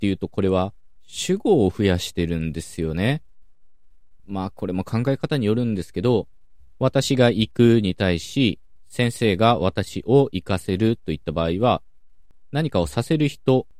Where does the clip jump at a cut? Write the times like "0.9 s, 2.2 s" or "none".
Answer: 4.2 s